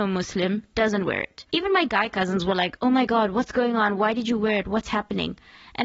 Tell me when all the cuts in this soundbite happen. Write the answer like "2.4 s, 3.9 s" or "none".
1.5 s